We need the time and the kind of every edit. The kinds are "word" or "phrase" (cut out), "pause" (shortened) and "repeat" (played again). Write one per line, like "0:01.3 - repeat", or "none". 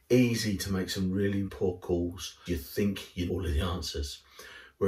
0:01.5 - word
0:02.5 - word
0:03.3 - word